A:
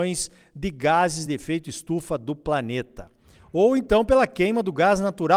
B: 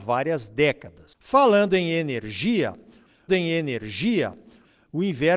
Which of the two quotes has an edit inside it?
B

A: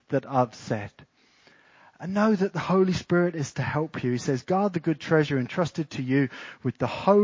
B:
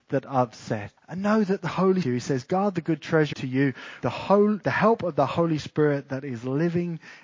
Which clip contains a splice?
B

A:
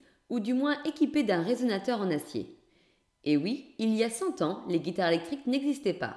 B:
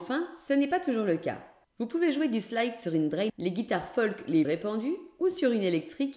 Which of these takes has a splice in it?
B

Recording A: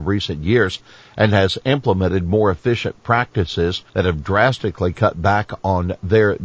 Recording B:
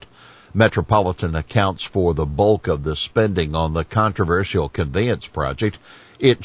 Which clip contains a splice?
A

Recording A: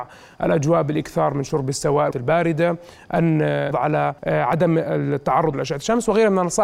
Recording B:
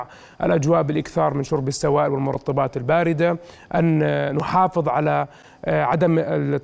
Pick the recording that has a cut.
A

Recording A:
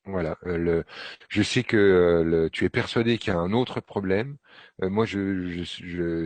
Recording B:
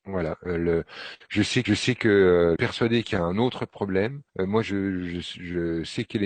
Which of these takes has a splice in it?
B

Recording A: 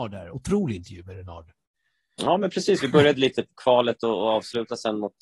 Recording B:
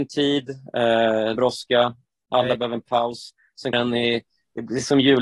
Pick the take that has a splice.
B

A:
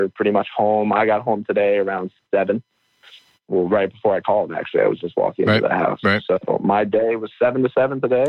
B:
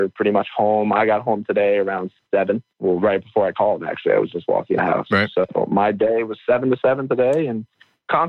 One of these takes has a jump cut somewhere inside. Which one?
B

